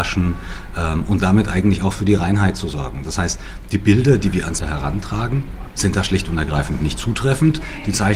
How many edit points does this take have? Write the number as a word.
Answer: one